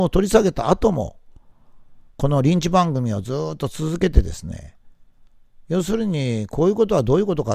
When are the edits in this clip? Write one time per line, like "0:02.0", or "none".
0:05.6